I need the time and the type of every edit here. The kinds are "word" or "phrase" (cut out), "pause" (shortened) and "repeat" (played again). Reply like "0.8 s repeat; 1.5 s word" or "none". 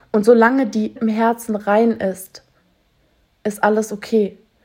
1.0 s word